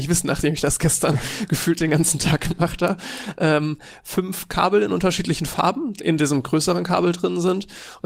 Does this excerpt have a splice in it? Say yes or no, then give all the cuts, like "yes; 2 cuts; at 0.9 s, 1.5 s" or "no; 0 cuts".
yes; 1 cut; at 6.0 s